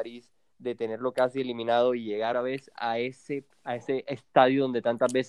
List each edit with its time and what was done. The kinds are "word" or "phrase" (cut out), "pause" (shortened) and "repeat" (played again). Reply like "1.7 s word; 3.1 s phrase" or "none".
2.3 s word; 3.5 s pause